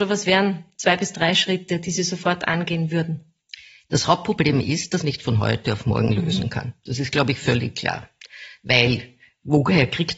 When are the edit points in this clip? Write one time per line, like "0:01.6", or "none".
0:05.0